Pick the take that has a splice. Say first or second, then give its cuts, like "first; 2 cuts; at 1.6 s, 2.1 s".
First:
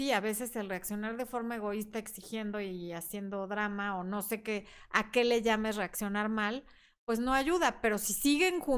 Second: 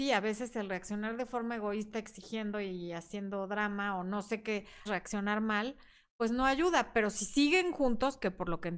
second; 1 cut; at 4.9 s